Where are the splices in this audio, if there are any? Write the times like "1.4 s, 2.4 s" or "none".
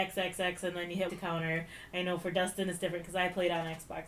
1.1 s

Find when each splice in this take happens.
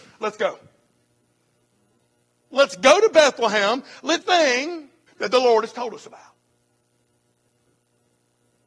4.2 s, 5.1 s

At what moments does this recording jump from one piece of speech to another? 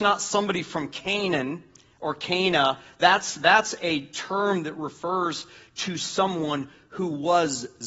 none

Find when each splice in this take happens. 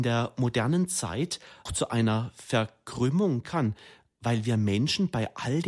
1.7 s, 3.4 s

